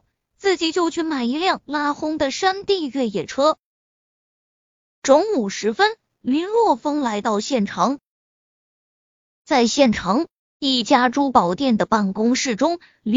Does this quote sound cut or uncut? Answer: uncut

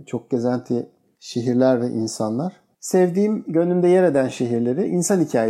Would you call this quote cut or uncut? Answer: uncut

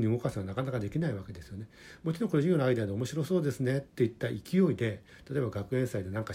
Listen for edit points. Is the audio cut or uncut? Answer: cut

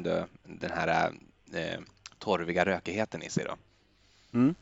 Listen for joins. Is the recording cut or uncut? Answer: uncut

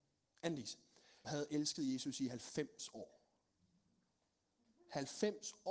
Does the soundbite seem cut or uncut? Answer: cut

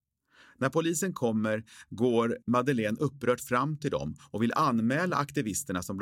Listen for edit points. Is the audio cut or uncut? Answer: uncut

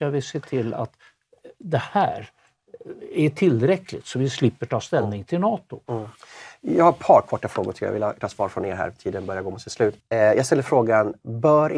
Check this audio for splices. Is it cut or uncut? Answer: cut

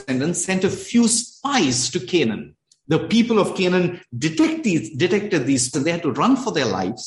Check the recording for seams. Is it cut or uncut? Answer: cut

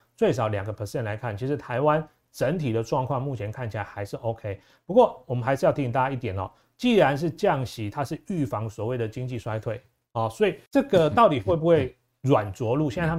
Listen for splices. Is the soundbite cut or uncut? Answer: cut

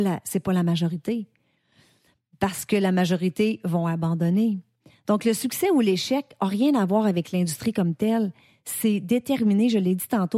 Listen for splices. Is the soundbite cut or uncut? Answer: uncut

